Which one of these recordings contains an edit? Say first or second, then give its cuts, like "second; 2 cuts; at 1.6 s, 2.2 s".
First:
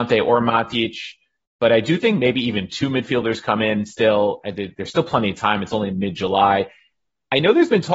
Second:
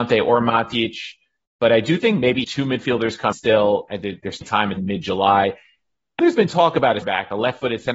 second; 6 cuts; at 2.4 s, 3.3 s, 4.4 s, 4.8 s, 6.2 s, 7.0 s